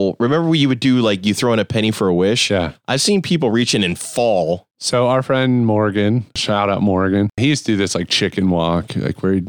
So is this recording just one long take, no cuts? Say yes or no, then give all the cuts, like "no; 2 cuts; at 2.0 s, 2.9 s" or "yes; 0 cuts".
yes; 0 cuts